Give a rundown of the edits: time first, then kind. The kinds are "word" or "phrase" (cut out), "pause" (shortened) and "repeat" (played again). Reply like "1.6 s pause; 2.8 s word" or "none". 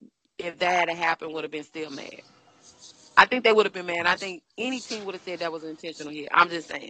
none